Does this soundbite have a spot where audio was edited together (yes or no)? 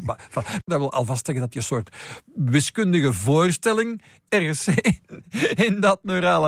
no